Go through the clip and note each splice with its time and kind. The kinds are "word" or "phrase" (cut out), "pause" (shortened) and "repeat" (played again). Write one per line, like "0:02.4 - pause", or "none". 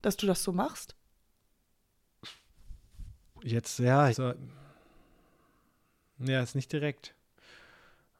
0:04.1 - word